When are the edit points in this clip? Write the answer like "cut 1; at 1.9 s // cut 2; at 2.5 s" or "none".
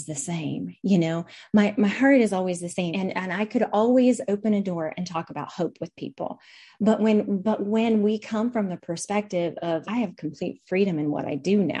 cut 1; at 2.9 s // cut 2; at 9.8 s